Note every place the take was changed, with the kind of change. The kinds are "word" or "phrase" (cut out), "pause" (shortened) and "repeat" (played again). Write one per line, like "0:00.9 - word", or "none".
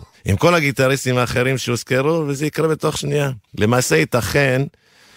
0:03.5 - pause